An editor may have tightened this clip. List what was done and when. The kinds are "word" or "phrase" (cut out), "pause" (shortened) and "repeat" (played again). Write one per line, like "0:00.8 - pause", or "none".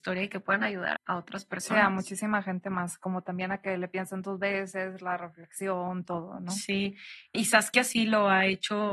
0:00.9 - word
0:07.3 - word